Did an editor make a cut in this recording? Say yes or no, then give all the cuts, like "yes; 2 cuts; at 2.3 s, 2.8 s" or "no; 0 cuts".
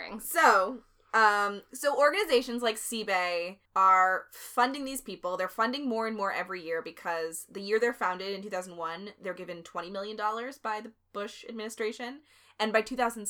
yes; 1 cut; at 3.6 s